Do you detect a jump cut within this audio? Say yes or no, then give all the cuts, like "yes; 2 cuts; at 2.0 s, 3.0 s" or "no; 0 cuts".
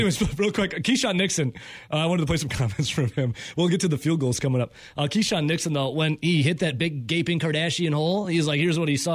no; 0 cuts